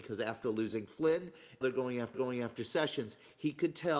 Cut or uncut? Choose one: cut